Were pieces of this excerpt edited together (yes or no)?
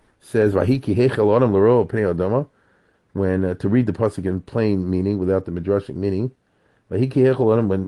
no